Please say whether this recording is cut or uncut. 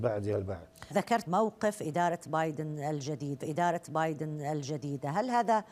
cut